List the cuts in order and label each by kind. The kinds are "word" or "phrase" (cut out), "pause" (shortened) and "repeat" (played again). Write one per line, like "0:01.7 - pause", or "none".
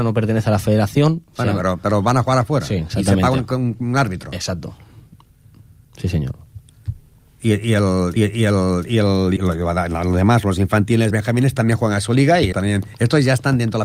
0:08.2 - repeat
0:09.4 - word
0:11.1 - word
0:12.5 - word